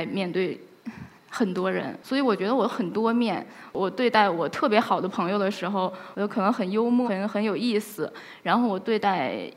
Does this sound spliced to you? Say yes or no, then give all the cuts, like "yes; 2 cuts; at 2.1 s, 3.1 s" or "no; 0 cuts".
yes; 3 cuts; at 1.2 s, 2.0 s, 7.0 s